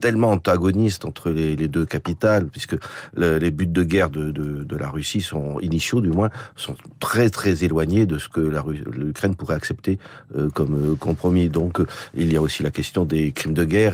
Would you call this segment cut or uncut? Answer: uncut